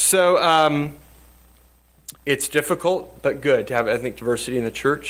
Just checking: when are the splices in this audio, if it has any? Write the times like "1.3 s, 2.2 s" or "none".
2.2 s